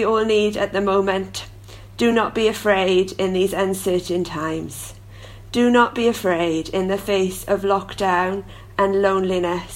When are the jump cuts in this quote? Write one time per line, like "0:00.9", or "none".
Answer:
none